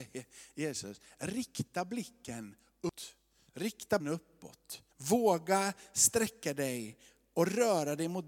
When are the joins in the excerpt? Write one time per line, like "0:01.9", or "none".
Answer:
0:04.0
0:04.9

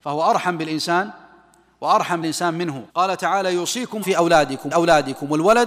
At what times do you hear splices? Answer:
0:02.2
0:02.9
0:04.0
0:04.7

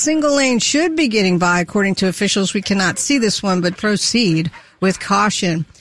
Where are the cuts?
0:03.7

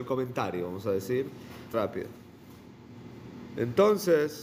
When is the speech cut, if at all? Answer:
0:01.7

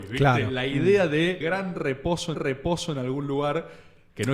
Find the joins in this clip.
0:01.4
0:02.3

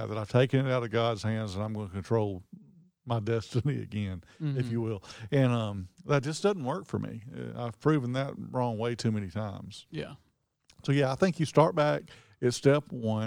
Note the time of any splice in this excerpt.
none

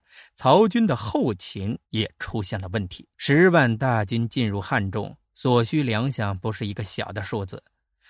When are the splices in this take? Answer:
0:01.8
0:03.1

